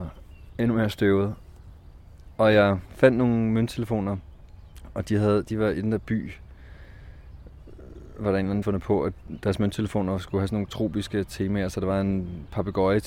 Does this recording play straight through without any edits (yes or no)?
no